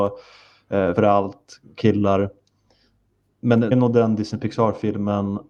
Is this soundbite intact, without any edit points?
no; 3 cuts; at 1.0 s, 1.6 s, 3.7 s

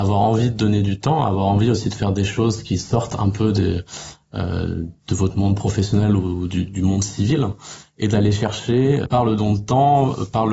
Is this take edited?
no; 0 cuts

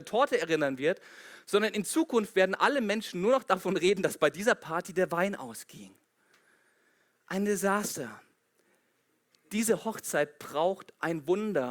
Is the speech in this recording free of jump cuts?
yes; 0 cuts

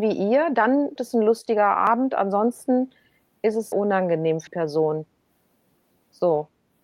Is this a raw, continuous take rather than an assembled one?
no; 3 cuts; at 1.0 s, 3.7 s, 4.5 s

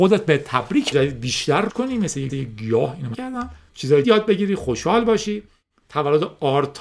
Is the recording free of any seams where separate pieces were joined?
no; 5 cuts; at 0.9 s, 1.7 s, 2.3 s, 3.1 s, 4.0 s

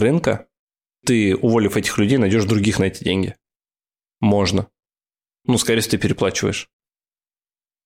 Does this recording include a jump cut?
no; 0 cuts

